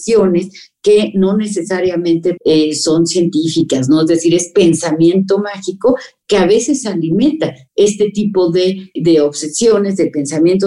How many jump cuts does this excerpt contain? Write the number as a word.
two